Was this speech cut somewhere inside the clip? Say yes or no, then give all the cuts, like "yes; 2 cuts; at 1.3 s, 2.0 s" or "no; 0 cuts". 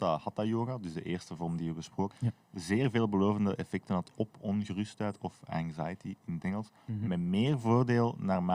yes; 1 cut; at 2.1 s